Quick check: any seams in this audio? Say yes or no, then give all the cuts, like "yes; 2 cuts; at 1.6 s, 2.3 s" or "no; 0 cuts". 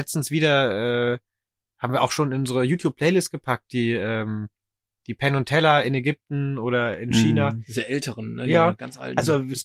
no; 0 cuts